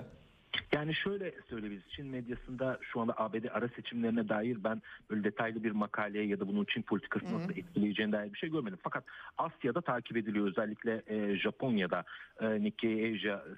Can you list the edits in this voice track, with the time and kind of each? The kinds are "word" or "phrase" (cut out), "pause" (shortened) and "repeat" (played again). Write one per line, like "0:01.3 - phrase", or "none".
none